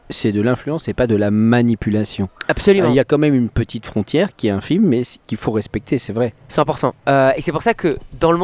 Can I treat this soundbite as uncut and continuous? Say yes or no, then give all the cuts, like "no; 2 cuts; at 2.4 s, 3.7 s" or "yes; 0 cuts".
yes; 0 cuts